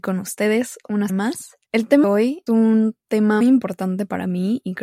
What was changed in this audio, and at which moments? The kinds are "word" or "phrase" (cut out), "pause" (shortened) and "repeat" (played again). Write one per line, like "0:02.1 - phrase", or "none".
0:01.1 - word
0:01.7 - pause
0:02.0 - word
0:02.5 - word
0:03.4 - word